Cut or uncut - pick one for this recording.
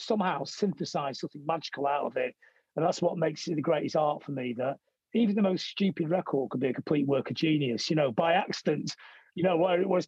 uncut